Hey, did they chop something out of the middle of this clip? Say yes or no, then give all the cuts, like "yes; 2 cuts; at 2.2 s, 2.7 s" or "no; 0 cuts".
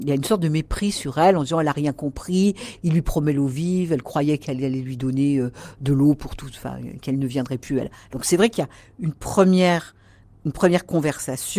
no; 0 cuts